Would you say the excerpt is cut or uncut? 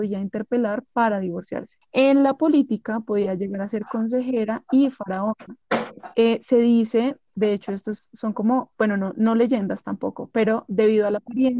uncut